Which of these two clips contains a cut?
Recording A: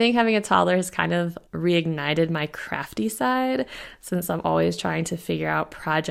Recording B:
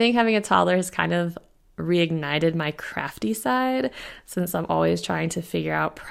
A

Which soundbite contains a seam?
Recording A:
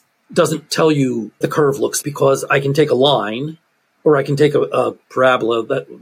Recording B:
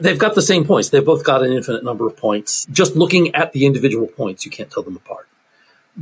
A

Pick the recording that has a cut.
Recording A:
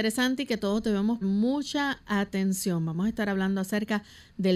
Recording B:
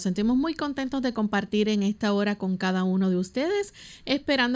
A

